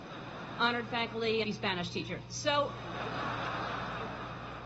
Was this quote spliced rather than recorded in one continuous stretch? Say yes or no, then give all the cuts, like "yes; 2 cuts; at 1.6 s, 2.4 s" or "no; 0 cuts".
yes; 1 cut; at 1.4 s